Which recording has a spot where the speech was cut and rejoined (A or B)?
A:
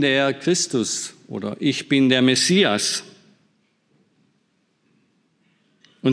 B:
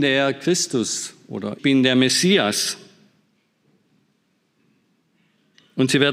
B